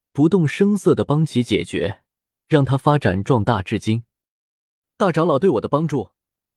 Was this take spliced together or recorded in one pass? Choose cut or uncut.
uncut